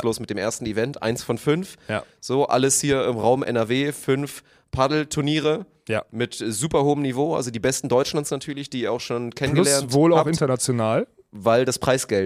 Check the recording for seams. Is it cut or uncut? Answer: uncut